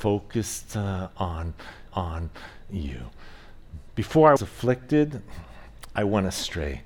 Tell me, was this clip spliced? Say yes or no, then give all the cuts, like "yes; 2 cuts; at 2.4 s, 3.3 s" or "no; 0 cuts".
yes; 2 cuts; at 1.9 s, 4.4 s